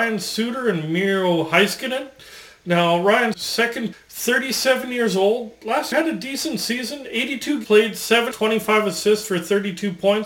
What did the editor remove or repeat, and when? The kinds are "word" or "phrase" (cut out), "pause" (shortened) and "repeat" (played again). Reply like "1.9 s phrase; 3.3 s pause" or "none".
3.3 s word; 3.9 s word; 5.9 s word; 7.6 s word; 8.3 s word